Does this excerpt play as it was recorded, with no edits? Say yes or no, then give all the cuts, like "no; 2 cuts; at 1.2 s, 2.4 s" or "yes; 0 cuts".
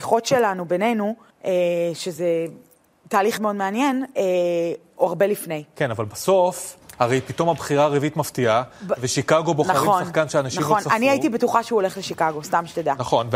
no; 3 cuts; at 1.3 s, 3.4 s, 6.9 s